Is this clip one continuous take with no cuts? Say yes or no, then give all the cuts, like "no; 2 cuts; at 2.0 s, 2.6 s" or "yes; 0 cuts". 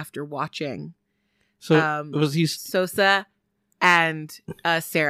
yes; 0 cuts